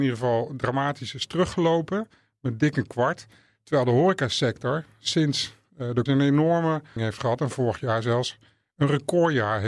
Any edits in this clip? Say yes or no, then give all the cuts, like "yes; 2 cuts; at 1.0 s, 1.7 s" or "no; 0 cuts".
yes; 2 cuts; at 6.1 s, 7.0 s